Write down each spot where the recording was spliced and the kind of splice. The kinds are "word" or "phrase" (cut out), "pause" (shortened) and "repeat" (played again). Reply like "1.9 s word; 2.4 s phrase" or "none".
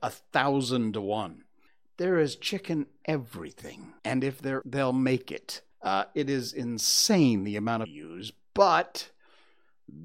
1.7 s pause; 4.0 s pause; 4.6 s word; 5.7 s pause; 7.8 s phrase